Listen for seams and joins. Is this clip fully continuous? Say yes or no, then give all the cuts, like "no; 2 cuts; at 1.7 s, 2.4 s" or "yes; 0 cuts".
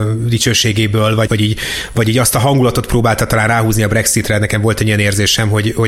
no; 1 cut; at 1.3 s